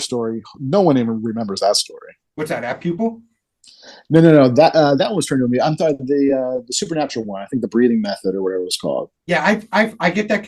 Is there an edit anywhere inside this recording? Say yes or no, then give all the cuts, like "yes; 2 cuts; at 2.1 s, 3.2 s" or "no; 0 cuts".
yes; 2 cuts; at 2.3 s, 9.2 s